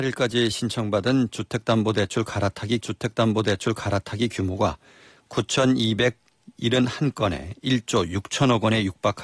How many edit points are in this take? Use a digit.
1